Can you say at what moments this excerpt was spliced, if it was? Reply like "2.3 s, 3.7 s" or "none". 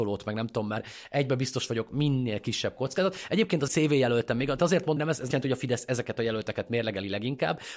3.7 s, 4.6 s, 5.0 s, 5.3 s